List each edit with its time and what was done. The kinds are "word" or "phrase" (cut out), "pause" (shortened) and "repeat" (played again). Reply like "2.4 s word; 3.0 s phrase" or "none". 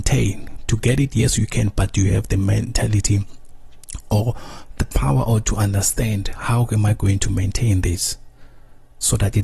none